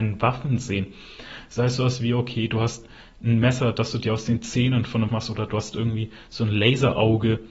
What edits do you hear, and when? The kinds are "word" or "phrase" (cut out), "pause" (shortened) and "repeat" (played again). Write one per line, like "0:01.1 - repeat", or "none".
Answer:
0:05.1 - word